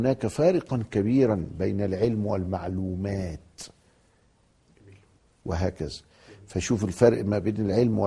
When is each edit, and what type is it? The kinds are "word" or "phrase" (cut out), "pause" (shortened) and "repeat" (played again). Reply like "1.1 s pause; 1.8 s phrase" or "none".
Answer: none